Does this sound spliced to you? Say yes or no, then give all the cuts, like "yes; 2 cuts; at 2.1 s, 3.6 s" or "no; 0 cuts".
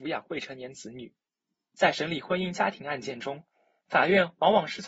no; 0 cuts